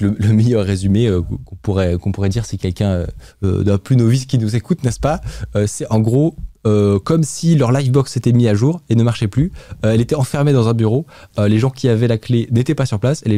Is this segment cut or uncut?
uncut